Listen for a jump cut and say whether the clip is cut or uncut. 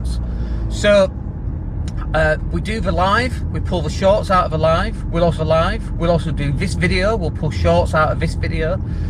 cut